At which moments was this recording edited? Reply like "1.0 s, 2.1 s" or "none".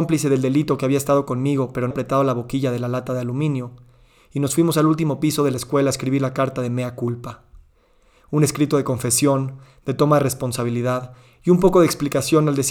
1.9 s

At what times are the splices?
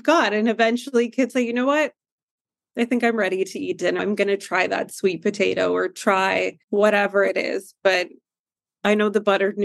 1.3 s, 4.0 s, 6.6 s

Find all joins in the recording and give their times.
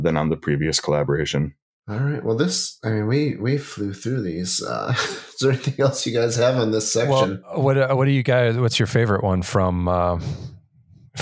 none

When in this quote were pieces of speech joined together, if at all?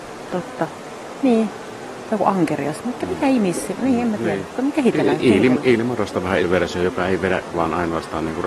6.4 s, 7.5 s

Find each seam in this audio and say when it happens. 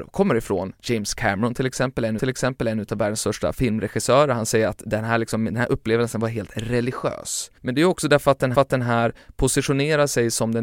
2.2 s, 7.6 s, 8.5 s

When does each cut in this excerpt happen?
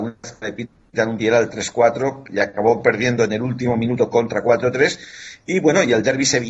1.2 s, 4.1 s

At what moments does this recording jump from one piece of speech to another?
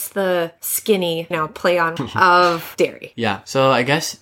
1.3 s, 2.0 s

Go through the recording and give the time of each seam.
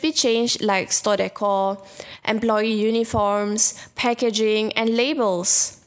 none

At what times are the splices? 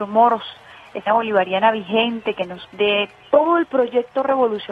1.1 s, 2.6 s

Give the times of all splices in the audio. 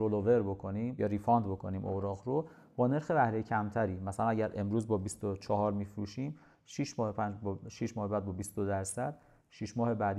none

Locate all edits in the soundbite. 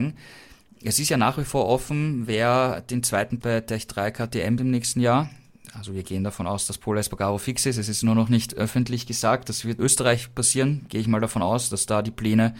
3.4 s, 4.6 s, 9.8 s

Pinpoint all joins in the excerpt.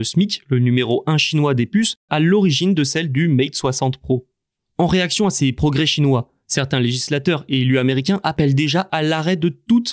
none

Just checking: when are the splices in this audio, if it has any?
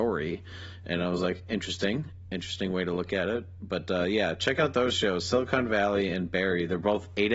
none

